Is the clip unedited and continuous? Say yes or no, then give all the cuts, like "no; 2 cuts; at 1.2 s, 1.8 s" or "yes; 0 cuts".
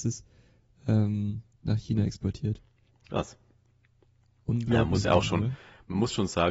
no; 2 cuts; at 1.5 s, 2.8 s